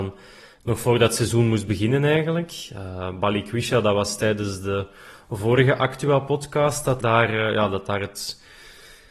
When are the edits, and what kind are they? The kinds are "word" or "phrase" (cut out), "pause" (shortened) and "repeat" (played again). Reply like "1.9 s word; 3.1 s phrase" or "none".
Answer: 7.0 s word